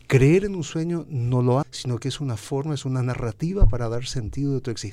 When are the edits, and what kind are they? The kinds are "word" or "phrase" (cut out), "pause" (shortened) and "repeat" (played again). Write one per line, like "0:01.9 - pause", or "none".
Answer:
0:01.6 - phrase